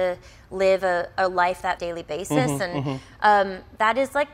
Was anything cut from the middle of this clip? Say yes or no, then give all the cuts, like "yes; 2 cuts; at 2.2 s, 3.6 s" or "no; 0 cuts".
yes; 1 cut; at 1.8 s